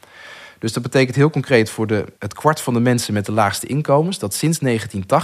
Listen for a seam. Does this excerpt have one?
yes; 1 cut; at 2.2 s

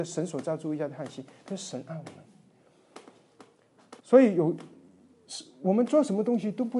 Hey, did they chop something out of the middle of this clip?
yes; 1 cut; at 4.0 s

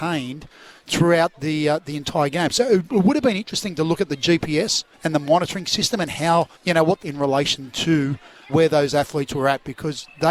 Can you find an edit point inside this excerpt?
yes; 4 cuts; at 4.9 s, 6.6 s, 7.0 s, 8.5 s

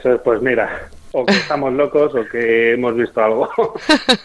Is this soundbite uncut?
yes; 0 cuts

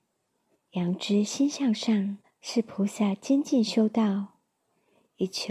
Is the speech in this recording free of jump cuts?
no; 1 cut; at 2.2 s

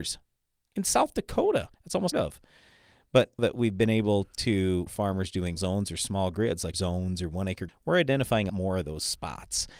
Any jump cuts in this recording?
yes; 8 cuts; at 1.8 s, 2.1 s, 3.4 s, 4.9 s, 5.6 s, 6.7 s, 7.7 s, 8.5 s

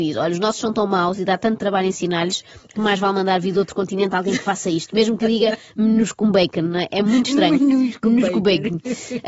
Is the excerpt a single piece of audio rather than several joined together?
yes; 0 cuts

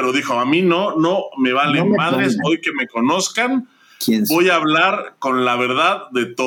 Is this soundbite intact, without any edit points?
yes; 0 cuts

